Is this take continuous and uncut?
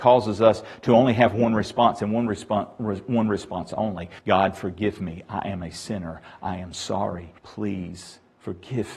no; 2 cuts; at 4.2 s, 7.4 s

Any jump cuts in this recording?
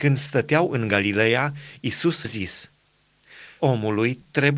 yes; 2 cuts; at 2.2 s, 3.6 s

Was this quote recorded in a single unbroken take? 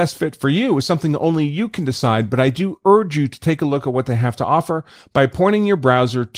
yes; 0 cuts

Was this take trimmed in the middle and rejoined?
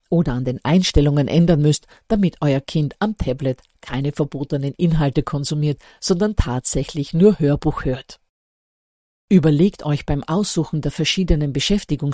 no; 0 cuts

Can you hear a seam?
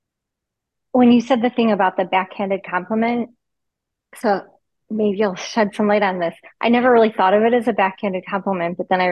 no; 0 cuts

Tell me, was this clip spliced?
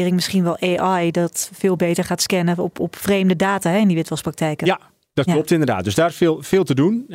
no; 0 cuts

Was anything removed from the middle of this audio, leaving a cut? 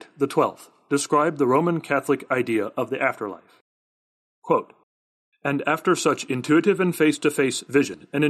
no; 0 cuts

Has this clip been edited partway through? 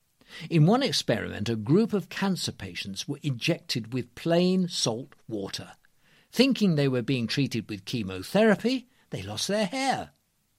no; 0 cuts

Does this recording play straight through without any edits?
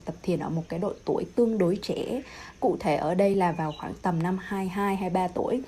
yes; 0 cuts

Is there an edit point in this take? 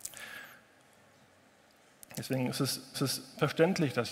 yes; 1 cut; at 2.9 s

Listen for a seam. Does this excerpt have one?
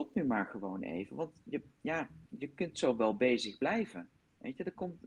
no; 0 cuts

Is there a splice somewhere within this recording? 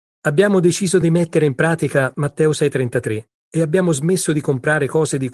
no; 0 cuts

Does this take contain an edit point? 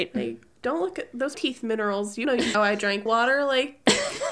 yes; 4 cuts; at 1.3 s, 2.2 s, 2.5 s, 3.1 s

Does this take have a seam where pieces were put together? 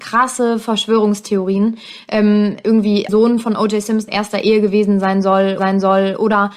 yes; 3 cuts; at 3.1 s, 4.1 s, 5.6 s

